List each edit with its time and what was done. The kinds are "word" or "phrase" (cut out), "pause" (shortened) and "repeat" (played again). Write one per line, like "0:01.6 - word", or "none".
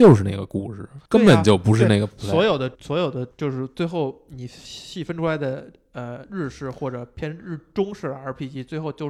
0:01.1 - pause
0:02.7 - pause
0:03.3 - pause